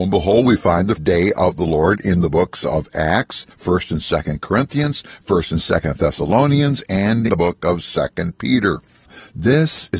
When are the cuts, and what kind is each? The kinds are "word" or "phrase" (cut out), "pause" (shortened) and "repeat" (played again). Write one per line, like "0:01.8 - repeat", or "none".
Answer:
0:01.0 - word
0:03.5 - pause
0:07.3 - word

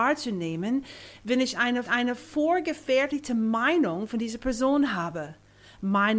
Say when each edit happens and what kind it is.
0:01.9 - repeat

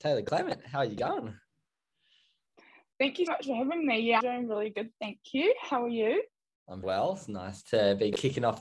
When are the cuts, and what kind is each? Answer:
0:03.3 - word
0:04.2 - word
0:06.8 - word

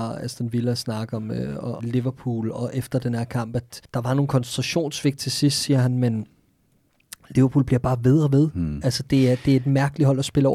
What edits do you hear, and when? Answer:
0:01.8 - phrase
0:02.5 - word
0:03.8 - pause

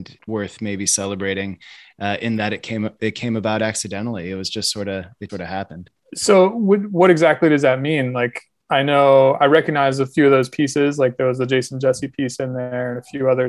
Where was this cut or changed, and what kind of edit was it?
0:05.3 - word

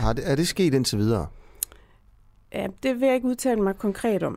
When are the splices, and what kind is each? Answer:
none

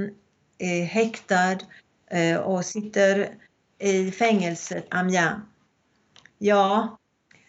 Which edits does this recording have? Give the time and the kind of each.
0:04.9 - word

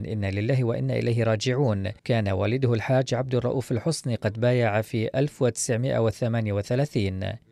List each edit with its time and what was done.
0:02.0 - pause

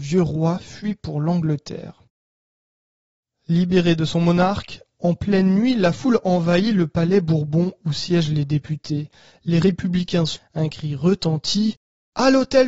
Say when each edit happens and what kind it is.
0:10.4 - word

